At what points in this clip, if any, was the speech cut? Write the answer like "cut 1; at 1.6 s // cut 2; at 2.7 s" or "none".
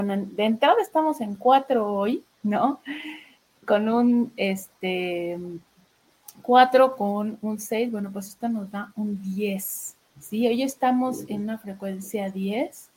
cut 1; at 2.3 s // cut 2; at 10.0 s

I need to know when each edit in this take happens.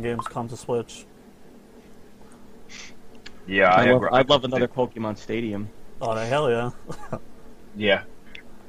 none

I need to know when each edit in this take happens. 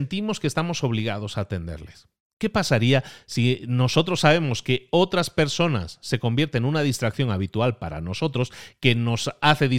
none

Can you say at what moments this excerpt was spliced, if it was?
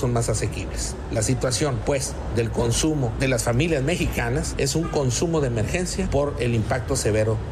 none

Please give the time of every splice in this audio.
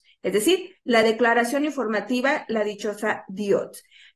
none

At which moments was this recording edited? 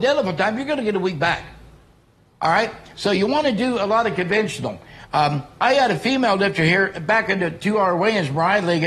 none

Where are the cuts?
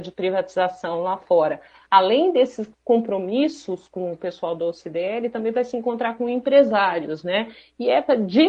none

